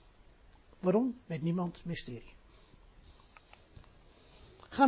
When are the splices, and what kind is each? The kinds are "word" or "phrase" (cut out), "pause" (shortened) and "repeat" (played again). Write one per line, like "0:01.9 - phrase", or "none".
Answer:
0:01.2 - pause